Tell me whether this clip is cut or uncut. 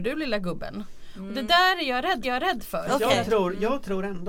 cut